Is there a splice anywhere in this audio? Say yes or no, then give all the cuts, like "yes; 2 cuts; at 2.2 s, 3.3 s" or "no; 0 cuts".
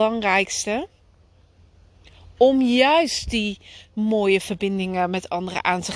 no; 0 cuts